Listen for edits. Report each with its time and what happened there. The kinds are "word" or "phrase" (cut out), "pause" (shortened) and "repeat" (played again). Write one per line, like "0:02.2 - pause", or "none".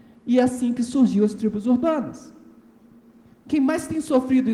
none